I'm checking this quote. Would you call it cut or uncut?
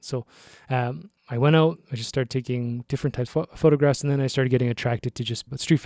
cut